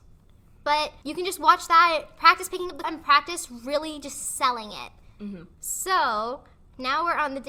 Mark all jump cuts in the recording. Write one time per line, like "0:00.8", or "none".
0:01.0
0:02.8
0:05.5